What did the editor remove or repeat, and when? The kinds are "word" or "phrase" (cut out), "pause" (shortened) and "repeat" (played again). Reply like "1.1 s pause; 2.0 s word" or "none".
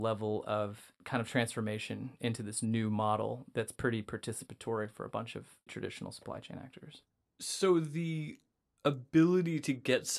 5.7 s word